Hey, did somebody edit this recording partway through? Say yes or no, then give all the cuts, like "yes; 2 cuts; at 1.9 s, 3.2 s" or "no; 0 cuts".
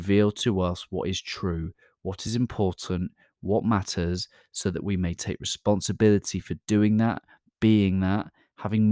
no; 0 cuts